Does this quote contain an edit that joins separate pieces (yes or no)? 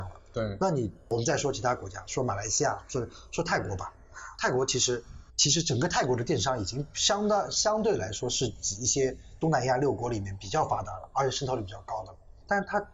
yes